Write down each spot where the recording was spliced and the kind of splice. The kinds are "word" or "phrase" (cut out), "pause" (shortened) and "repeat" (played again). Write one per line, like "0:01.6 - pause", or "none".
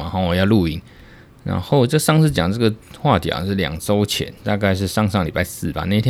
0:04.4 - pause